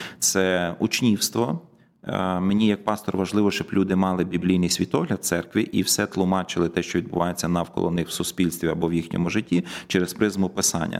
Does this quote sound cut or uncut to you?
uncut